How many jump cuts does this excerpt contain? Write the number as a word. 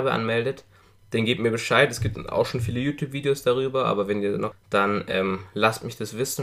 one